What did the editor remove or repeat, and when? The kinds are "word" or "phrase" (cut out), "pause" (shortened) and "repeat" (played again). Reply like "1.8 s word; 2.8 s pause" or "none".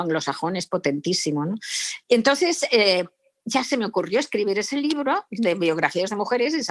none